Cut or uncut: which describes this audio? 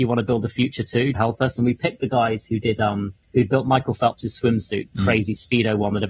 cut